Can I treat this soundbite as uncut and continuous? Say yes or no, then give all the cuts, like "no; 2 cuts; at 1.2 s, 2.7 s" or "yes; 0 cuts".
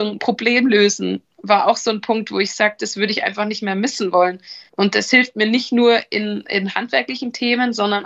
no; 1 cut; at 4.7 s